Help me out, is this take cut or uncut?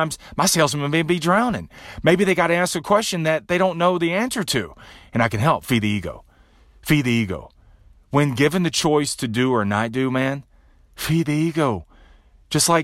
uncut